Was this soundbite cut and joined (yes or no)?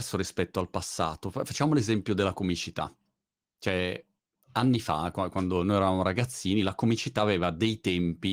no